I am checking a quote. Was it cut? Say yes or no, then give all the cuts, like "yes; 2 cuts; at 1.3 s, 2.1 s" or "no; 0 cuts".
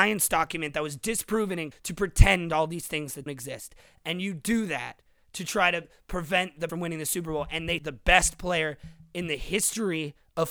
yes; 4 cuts; at 1.7 s, 3.3 s, 6.7 s, 7.8 s